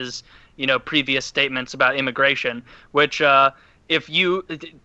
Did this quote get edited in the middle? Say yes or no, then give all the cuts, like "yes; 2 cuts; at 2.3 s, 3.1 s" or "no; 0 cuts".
no; 0 cuts